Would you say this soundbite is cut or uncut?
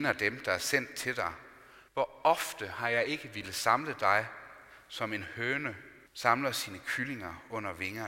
cut